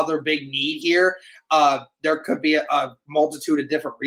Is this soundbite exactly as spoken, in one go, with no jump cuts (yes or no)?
yes